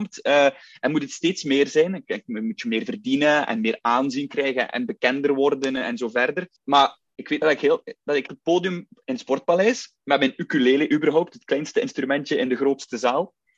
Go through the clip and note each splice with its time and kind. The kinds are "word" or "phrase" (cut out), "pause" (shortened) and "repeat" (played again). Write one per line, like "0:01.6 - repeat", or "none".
0:06.6 - pause
0:07.4 - word
0:08.3 - phrase